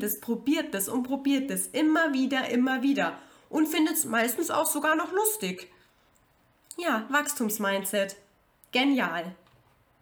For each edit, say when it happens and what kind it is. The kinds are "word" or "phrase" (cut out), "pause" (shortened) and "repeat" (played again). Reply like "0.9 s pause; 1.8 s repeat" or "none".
none